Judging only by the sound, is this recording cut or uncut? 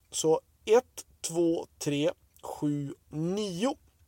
cut